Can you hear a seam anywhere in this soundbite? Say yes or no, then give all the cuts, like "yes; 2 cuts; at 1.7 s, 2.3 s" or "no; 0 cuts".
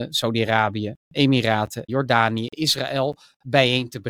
yes; 1 cut; at 1.9 s